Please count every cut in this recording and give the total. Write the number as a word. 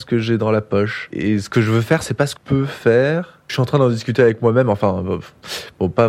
one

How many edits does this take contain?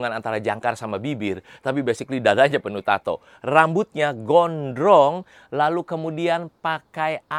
zero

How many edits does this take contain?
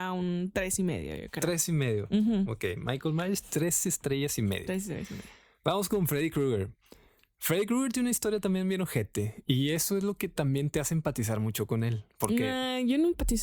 zero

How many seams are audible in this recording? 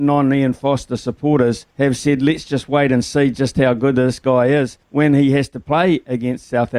two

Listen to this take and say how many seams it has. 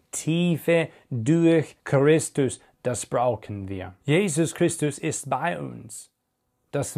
two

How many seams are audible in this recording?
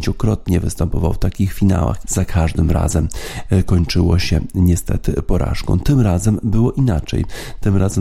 one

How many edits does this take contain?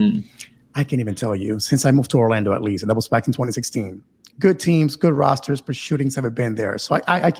zero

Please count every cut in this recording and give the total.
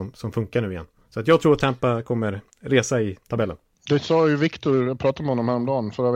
one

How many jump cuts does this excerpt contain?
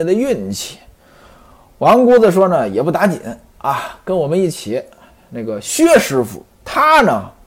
one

